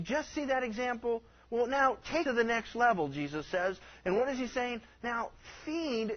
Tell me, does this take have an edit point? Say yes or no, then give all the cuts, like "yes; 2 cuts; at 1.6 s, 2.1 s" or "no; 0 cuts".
yes; 1 cut; at 2.3 s